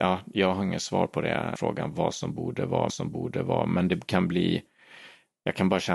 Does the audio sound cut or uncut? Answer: cut